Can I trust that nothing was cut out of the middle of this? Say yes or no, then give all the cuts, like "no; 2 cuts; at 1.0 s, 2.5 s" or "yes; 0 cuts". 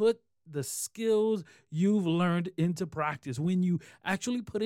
yes; 0 cuts